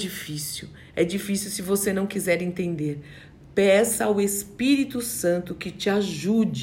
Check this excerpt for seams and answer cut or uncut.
uncut